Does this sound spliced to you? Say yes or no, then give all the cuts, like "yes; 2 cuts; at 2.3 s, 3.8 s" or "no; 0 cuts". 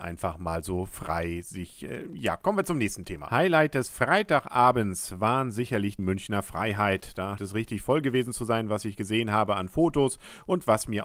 yes; 2 cuts; at 6.0 s, 7.4 s